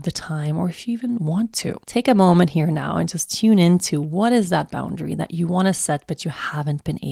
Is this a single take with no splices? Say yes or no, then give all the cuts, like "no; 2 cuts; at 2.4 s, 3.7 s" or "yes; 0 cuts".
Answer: no; 1 cut; at 1.8 s